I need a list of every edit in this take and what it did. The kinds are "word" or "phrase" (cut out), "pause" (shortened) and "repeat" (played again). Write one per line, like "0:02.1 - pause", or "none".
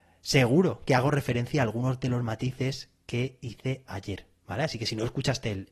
none